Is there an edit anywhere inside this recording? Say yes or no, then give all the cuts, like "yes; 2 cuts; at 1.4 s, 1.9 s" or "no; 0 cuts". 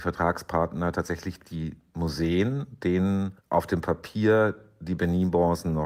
yes; 1 cut; at 3.4 s